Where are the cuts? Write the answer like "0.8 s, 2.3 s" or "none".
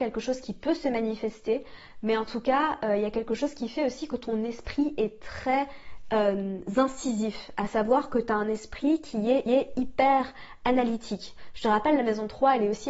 9.5 s

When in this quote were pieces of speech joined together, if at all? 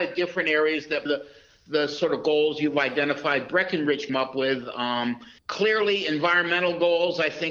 1.1 s, 4.1 s, 5.4 s

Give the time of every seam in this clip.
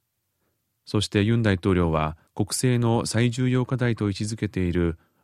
2.3 s

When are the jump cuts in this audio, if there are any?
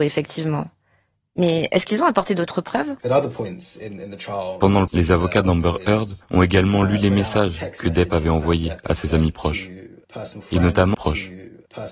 3.0 s, 4.9 s, 6.2 s, 10.9 s

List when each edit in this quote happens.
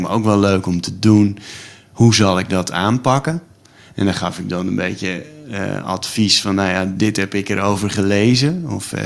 none

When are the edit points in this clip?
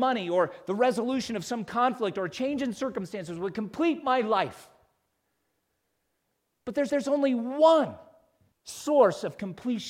6.9 s

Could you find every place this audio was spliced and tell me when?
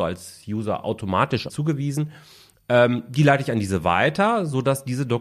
1.5 s

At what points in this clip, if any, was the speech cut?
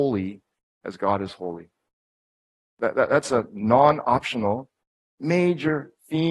none

